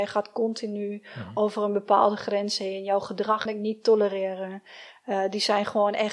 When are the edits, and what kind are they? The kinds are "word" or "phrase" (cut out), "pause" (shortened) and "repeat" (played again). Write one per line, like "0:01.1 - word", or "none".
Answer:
0:03.5 - phrase